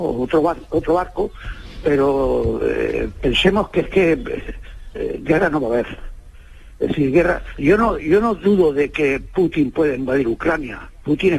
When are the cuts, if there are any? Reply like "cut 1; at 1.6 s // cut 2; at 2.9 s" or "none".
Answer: none